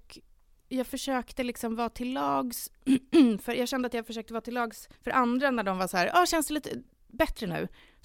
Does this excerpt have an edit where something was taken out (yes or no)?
yes